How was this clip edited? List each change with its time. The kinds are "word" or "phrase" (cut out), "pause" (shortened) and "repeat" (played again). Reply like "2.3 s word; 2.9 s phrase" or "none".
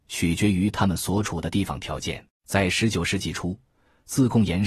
2.3 s pause